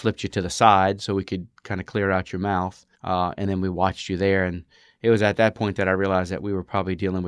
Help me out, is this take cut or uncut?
cut